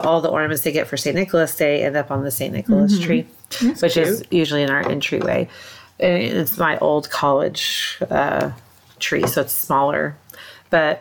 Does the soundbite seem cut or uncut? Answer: uncut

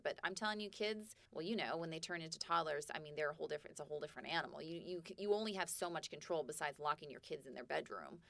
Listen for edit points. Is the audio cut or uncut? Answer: cut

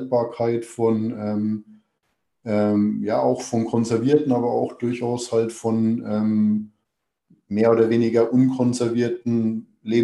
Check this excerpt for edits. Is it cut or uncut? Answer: uncut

